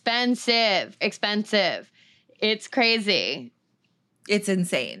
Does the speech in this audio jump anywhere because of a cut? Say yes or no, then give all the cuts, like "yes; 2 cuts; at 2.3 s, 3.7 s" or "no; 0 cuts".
yes; 1 cut; at 1.0 s